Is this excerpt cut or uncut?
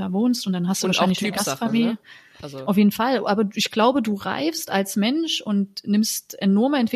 uncut